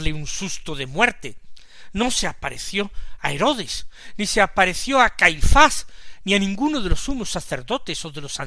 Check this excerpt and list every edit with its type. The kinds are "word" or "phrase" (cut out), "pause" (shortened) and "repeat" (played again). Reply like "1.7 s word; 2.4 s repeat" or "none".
none